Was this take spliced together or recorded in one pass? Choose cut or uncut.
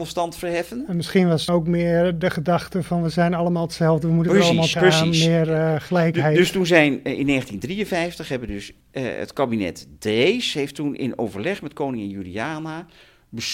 cut